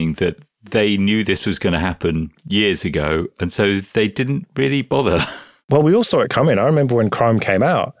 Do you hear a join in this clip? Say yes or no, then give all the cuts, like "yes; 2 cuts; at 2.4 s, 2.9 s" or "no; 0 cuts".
no; 0 cuts